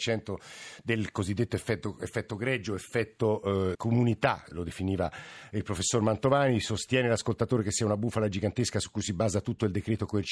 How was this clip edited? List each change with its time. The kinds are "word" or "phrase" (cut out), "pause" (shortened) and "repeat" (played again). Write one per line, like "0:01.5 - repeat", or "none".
0:03.7 - word